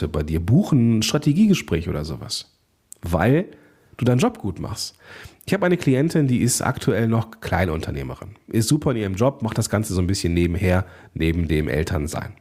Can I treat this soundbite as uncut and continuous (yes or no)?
yes